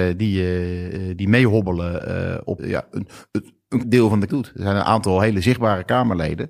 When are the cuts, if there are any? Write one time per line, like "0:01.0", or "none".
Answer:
0:02.6
0:03.8
0:04.3